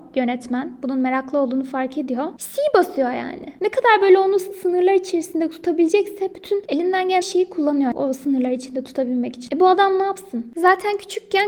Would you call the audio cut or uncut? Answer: cut